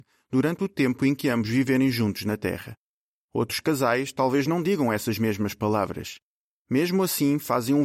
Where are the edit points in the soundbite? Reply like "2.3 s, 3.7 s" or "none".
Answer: none

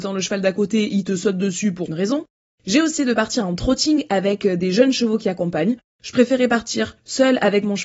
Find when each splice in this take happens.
1.9 s, 3.0 s

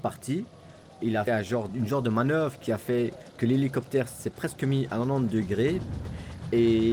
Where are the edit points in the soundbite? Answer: 1.3 s

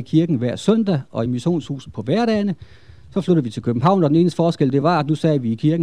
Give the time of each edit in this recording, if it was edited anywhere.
none

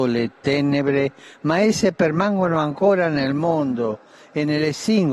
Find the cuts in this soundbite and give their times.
none

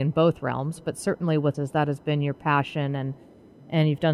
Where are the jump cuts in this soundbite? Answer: 1.5 s

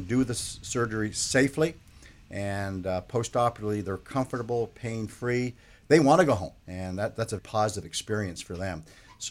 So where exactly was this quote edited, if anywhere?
7.4 s

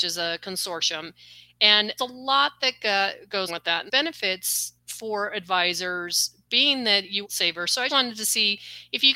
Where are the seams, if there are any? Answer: 2.0 s, 3.5 s, 3.9 s, 4.8 s, 6.4 s, 7.2 s, 7.9 s

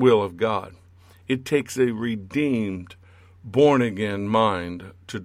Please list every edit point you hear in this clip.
none

